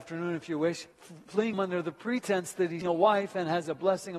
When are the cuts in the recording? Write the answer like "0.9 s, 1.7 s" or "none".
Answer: 0.9 s, 1.5 s, 2.8 s